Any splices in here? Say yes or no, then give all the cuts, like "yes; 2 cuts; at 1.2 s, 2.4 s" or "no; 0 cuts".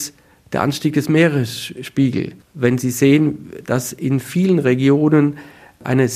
yes; 1 cut; at 2.4 s